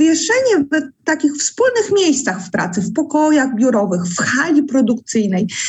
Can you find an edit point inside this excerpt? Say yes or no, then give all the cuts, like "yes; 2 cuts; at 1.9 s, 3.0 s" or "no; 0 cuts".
no; 0 cuts